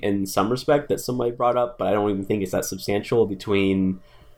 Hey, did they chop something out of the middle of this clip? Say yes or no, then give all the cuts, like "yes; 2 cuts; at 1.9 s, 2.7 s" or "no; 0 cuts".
no; 0 cuts